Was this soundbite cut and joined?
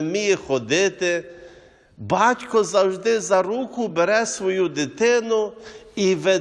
no; 0 cuts

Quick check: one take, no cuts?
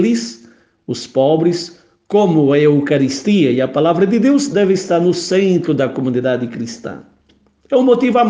yes; 0 cuts

